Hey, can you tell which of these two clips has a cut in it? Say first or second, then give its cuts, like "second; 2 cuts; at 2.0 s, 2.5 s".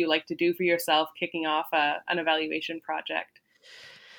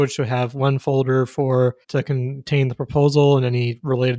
second; 1 cut; at 1.8 s